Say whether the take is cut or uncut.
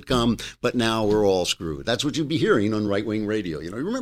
uncut